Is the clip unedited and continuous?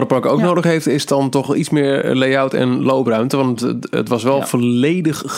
yes; 0 cuts

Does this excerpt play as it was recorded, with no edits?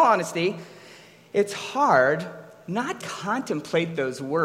no; 1 cut; at 3.0 s

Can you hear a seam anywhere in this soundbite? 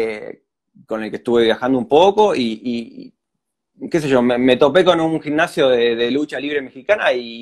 no; 0 cuts

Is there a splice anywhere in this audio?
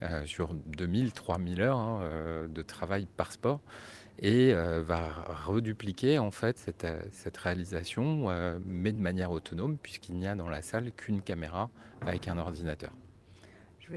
no; 0 cuts

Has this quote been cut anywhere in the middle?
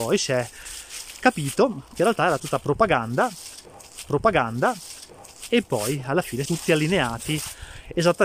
yes; 3 cuts; at 2.4 s, 4.0 s, 6.5 s

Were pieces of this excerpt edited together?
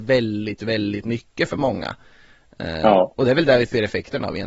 no; 0 cuts

